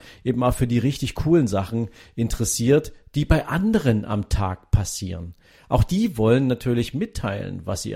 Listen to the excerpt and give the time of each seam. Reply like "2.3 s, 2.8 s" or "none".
none

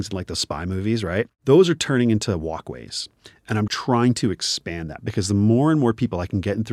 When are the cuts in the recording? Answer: 3.7 s

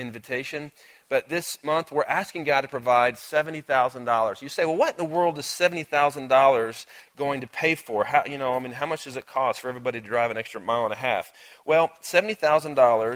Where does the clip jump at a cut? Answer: none

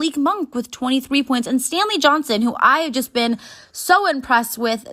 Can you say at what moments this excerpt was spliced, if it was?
none

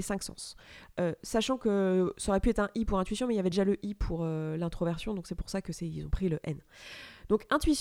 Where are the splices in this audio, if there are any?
none

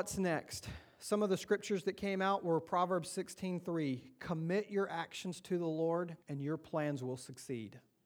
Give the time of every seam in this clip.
6.2 s

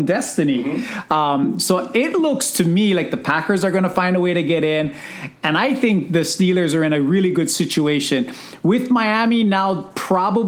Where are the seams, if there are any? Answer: none

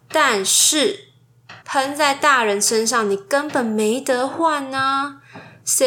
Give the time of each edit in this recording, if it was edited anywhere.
1.6 s

